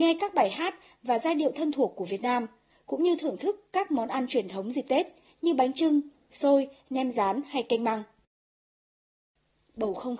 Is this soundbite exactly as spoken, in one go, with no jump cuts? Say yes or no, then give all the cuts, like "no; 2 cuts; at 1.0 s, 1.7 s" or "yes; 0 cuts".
yes; 0 cuts